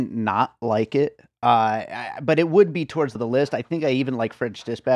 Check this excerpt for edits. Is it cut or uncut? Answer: cut